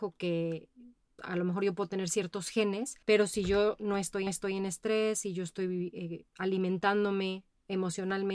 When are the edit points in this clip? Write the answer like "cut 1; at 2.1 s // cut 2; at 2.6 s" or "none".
cut 1; at 1.2 s // cut 2; at 3.0 s // cut 3; at 4.3 s // cut 4; at 6.3 s